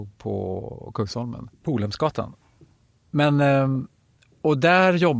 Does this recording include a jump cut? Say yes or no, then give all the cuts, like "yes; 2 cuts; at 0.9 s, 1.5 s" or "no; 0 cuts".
no; 0 cuts